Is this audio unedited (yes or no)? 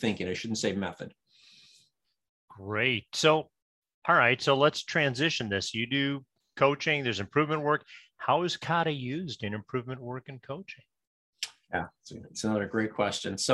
yes